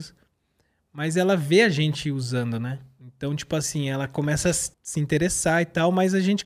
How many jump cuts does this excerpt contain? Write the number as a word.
one